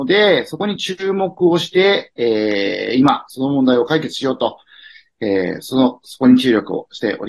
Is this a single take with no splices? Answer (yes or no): yes